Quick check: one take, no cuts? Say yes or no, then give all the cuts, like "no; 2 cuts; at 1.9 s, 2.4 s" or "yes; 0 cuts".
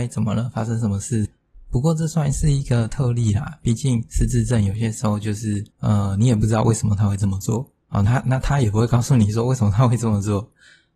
no; 2 cuts; at 5.7 s, 7.8 s